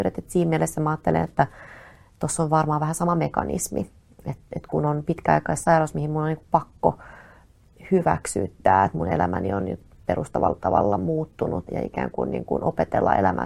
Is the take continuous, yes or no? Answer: no